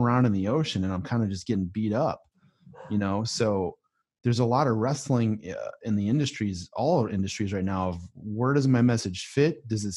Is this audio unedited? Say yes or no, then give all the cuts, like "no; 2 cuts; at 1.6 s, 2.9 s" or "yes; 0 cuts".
yes; 0 cuts